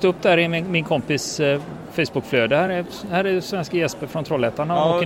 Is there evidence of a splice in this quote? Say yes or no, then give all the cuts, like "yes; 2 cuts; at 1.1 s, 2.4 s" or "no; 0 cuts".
no; 0 cuts